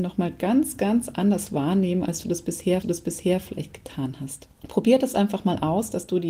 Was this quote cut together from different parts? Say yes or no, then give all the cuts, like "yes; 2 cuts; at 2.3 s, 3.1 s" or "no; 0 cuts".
yes; 2 cuts; at 2.8 s, 4.6 s